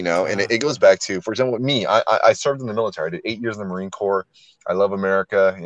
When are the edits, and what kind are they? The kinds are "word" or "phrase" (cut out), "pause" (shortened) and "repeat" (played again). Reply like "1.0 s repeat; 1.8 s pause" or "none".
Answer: none